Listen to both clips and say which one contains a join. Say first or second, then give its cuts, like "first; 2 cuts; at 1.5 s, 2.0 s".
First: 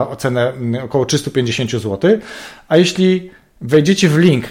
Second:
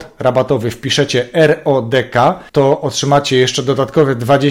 second; 1 cut; at 2.5 s